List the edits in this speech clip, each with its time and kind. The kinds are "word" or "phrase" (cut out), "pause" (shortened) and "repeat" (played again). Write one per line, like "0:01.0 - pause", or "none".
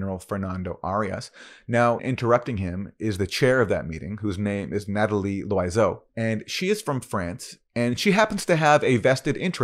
0:02.0 - phrase
0:06.1 - pause